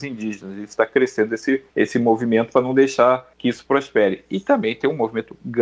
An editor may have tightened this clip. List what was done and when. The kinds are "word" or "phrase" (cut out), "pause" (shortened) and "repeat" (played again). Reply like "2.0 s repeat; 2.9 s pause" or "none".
1.7 s pause; 3.3 s pause